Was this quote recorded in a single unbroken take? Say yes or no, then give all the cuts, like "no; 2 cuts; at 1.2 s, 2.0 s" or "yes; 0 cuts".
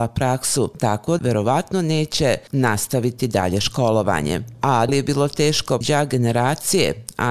no; 3 cuts; at 1.2 s, 4.9 s, 5.8 s